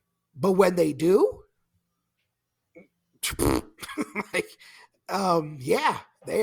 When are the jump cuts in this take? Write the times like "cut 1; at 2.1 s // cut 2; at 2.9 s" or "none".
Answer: none